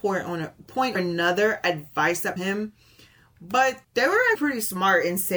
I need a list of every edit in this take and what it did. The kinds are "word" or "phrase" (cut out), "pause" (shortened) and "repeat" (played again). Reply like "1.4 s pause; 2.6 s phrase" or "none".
0.9 s word; 2.4 s word; 3.8 s pause; 4.3 s word